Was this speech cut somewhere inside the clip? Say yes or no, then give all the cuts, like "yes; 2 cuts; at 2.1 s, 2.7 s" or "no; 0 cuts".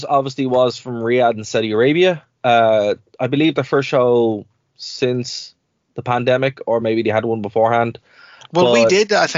no; 0 cuts